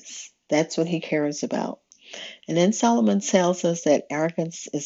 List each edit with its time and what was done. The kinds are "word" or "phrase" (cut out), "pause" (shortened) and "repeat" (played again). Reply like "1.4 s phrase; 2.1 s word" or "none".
none

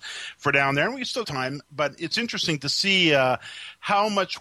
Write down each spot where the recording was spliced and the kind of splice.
1.2 s word; 2.1 s word

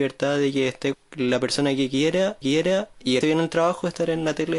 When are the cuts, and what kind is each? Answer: 0.9 s word; 2.4 s repeat; 3.2 s word

